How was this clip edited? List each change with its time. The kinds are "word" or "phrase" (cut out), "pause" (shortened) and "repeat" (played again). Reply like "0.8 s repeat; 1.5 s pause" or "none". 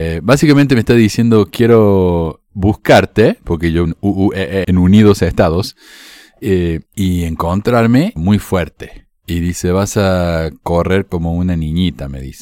3.8 s word; 4.6 s word; 6.9 s pause; 8.2 s phrase; 9.2 s pause